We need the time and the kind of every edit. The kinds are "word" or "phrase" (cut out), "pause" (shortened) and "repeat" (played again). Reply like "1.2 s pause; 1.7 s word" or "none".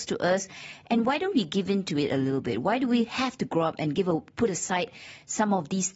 none